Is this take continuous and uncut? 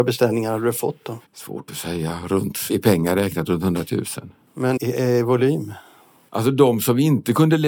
no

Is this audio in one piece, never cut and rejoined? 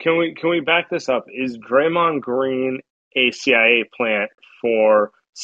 yes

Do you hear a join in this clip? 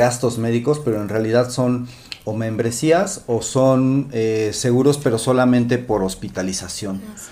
no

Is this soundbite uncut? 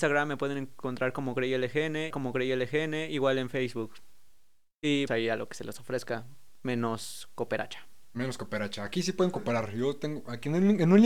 no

